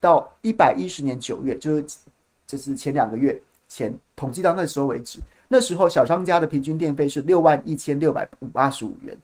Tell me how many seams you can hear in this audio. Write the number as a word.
zero